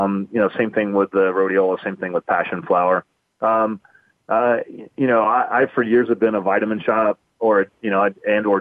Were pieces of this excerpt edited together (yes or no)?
no